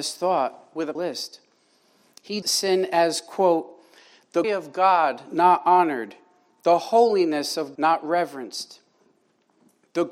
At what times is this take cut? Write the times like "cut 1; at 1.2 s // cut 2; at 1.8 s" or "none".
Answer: cut 1; at 1.0 s // cut 2; at 2.4 s // cut 3; at 4.4 s // cut 4; at 7.8 s